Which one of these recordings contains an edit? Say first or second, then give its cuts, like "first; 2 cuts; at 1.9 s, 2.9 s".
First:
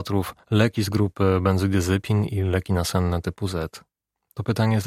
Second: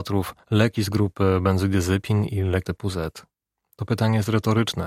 second; 1 cut; at 2.6 s